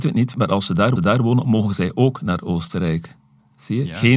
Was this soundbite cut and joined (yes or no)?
yes